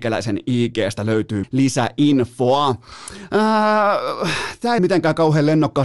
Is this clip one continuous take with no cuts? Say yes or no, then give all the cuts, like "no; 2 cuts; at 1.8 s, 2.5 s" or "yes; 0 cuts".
no; 2 cuts; at 1.4 s, 4.8 s